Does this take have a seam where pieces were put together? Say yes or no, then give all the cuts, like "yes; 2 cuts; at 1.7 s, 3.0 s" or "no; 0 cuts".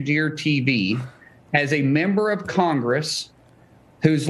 no; 0 cuts